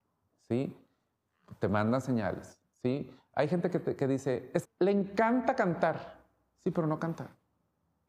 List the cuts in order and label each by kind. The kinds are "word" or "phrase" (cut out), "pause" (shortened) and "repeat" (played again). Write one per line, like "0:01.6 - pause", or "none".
0:04.6 - word